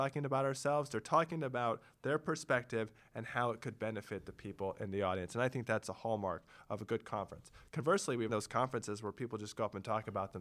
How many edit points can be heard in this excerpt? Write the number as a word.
one